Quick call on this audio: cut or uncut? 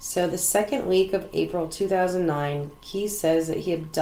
uncut